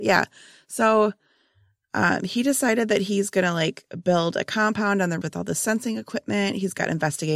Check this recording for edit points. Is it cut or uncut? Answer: cut